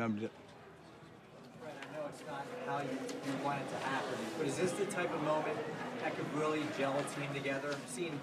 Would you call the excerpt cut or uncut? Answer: uncut